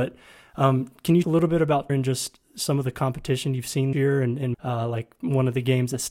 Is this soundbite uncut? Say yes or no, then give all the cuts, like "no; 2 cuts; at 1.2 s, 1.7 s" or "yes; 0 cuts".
no; 4 cuts; at 1.2 s, 1.9 s, 3.9 s, 4.5 s